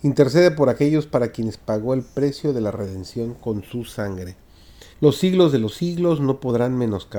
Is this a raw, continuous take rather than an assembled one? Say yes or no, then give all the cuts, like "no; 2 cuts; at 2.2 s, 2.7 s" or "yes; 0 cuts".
no; 1 cut; at 4.9 s